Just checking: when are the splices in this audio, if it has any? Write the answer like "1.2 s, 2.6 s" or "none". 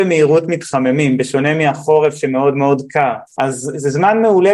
3.3 s

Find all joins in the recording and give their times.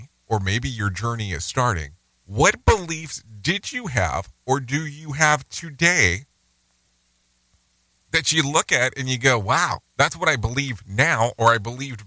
9.8 s

